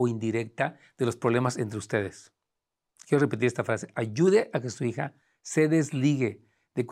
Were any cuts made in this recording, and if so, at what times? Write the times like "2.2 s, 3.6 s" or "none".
none